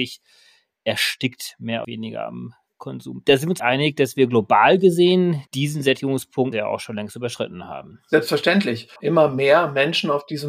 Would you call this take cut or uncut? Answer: cut